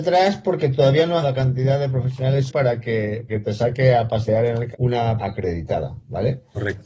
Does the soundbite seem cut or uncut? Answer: cut